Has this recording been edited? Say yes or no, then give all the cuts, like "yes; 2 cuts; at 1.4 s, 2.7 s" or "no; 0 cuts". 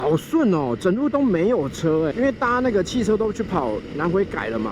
yes; 1 cut; at 2.1 s